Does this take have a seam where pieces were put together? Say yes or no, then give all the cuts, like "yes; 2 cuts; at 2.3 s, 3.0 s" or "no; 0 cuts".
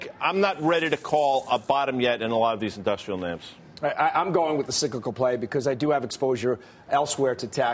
no; 0 cuts